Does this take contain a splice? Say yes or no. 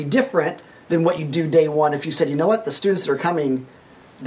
no